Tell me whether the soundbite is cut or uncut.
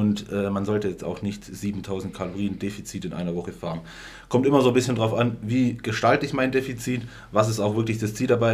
uncut